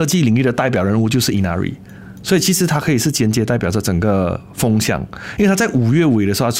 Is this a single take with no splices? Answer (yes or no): yes